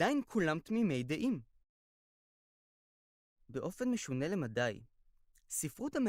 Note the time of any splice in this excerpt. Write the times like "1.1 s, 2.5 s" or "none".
none